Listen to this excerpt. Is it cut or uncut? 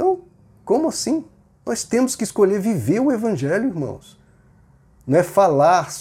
uncut